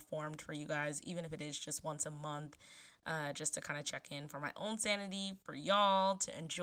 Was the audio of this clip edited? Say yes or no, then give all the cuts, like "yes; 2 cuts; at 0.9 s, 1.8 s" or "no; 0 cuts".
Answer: no; 0 cuts